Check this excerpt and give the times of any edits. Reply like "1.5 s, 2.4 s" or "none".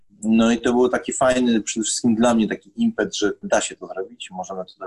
3.4 s